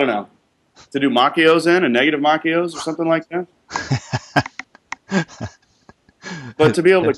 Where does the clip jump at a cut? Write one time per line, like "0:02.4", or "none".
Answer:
0:04.6